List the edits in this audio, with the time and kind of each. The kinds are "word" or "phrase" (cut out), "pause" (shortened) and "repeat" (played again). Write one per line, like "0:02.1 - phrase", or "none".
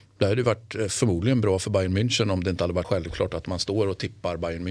0:02.8 - word